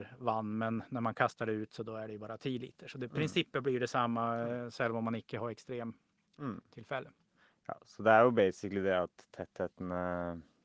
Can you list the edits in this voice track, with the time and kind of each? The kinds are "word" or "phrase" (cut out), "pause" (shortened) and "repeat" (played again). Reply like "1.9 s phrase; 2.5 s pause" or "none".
none